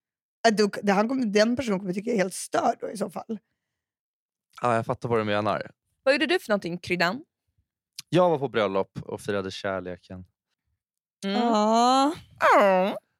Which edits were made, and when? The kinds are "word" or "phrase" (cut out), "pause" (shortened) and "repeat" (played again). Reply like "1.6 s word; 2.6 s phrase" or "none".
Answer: 9.0 s word